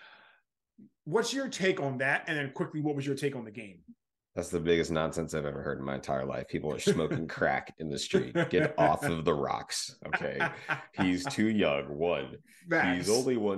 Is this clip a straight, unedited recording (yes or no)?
yes